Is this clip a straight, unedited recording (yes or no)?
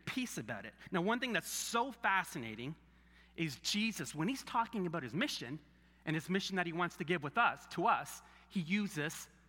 yes